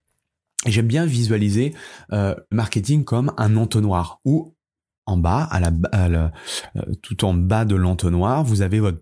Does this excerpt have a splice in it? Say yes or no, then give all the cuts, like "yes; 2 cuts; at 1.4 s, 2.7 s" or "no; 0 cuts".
yes; 1 cut; at 2.5 s